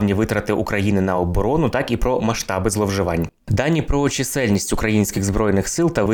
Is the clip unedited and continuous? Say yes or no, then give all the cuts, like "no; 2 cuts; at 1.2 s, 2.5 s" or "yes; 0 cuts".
yes; 0 cuts